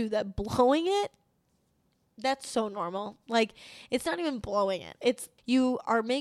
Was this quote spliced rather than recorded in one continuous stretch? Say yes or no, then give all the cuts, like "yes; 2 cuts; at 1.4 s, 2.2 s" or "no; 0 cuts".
no; 0 cuts